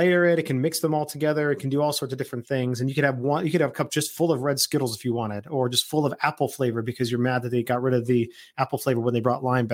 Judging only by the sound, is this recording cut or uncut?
uncut